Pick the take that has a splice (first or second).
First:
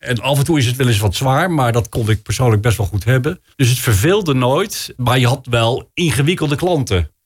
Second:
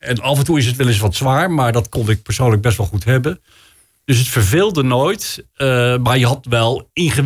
first